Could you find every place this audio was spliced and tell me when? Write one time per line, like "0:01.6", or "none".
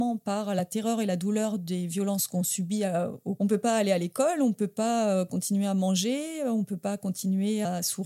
0:03.4

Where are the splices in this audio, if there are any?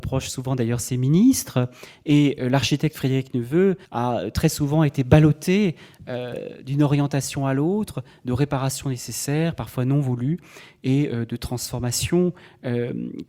0:03.8

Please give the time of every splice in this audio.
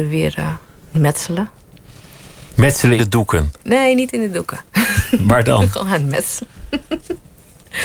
0:00.9
0:03.0
0:03.6

